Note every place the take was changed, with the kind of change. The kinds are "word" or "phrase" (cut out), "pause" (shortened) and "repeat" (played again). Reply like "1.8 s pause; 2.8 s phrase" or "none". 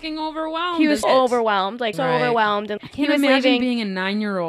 1.0 s word; 1.9 s word; 2.8 s word